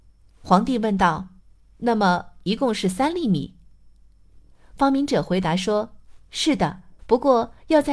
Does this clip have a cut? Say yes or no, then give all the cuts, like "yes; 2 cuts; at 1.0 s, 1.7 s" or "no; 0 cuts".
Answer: yes; 2 cuts; at 1.4 s, 7.0 s